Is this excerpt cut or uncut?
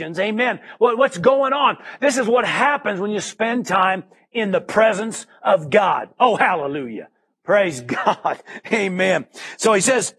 uncut